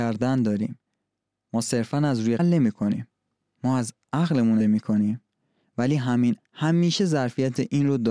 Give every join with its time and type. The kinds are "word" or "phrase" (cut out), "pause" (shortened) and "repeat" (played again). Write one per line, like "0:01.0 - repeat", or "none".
0:02.4 - phrase
0:04.6 - word
0:06.4 - word